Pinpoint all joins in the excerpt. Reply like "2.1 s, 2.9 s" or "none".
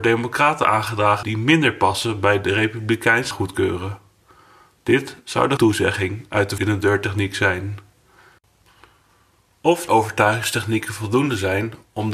1.2 s, 3.3 s, 5.6 s, 6.6 s, 9.9 s